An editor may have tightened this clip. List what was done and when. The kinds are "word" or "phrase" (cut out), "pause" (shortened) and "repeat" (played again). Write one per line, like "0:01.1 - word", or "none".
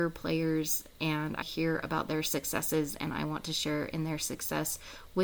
0:01.4 - word